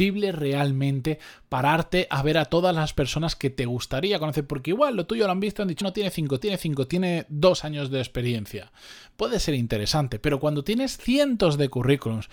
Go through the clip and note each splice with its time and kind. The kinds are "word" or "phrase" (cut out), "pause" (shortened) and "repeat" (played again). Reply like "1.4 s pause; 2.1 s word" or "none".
5.8 s word; 6.4 s repeat